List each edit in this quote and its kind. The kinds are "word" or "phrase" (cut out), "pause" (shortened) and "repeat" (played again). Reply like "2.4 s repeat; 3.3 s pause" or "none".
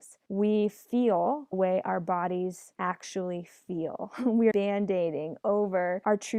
1.5 s word; 4.5 s phrase